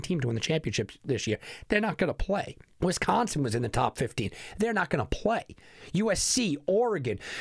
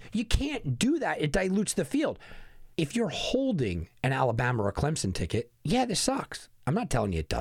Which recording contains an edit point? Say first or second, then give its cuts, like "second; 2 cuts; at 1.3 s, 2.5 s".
second; 1 cut; at 2.7 s